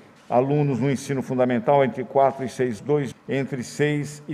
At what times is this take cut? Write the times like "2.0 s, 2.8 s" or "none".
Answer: 2.8 s, 3.1 s